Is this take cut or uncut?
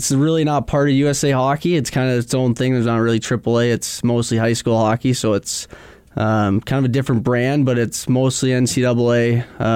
uncut